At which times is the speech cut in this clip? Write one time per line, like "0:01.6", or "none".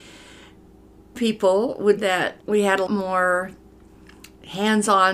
0:01.1
0:02.0
0:02.4
0:02.9